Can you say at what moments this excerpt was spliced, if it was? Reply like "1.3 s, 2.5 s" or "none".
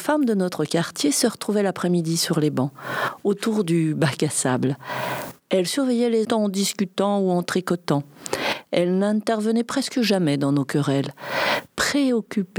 6.2 s